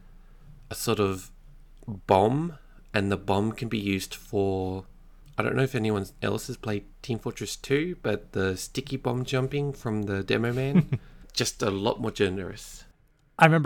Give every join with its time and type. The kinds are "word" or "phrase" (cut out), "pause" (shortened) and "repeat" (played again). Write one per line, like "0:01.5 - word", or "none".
none